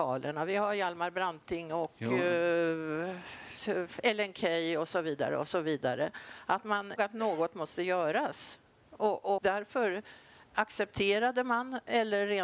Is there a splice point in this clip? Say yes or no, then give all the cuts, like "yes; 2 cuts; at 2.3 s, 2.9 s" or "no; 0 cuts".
yes; 2 cuts; at 7.0 s, 9.4 s